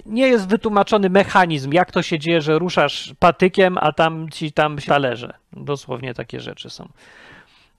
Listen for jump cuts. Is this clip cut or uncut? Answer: cut